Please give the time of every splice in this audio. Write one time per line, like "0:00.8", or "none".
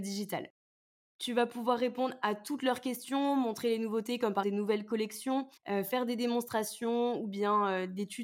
0:04.4
0:05.6